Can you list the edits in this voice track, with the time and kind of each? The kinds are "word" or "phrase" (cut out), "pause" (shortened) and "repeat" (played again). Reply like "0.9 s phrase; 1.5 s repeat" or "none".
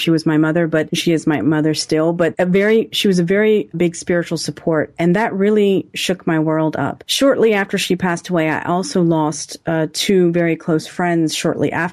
3.7 s word